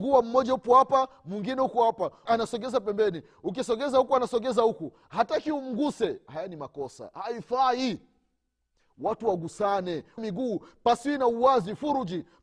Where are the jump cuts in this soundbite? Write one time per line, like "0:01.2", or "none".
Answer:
0:02.3
0:10.2

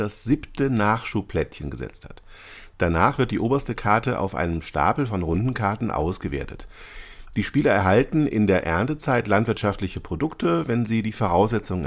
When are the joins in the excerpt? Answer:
none

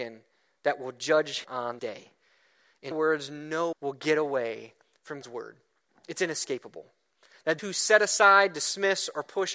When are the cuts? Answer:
0:01.4
0:01.8
0:02.9
0:03.7
0:05.2
0:07.6

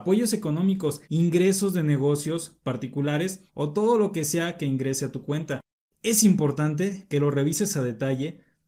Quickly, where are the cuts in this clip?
0:01.0
0:03.5

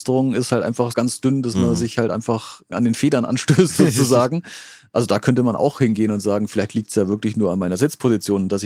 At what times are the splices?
0:00.9
0:02.7

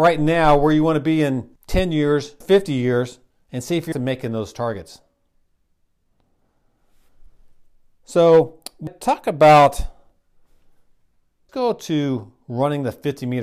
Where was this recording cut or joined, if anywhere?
0:01.6
0:02.4
0:03.3
0:03.9
0:08.9
0:11.5

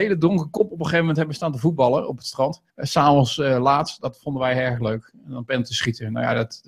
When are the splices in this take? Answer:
0:02.7

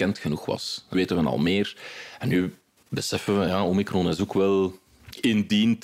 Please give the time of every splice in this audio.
0:00.9

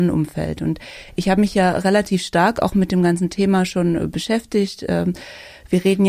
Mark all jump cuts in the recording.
none

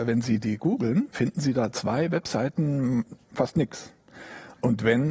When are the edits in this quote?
0:01.1
0:03.2

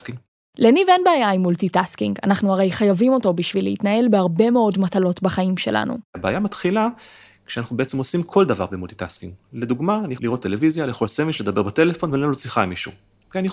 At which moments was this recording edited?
0:06.1
0:10.2

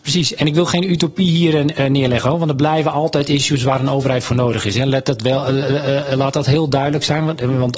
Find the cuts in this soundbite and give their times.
none

